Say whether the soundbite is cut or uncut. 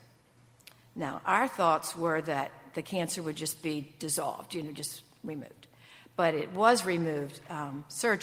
uncut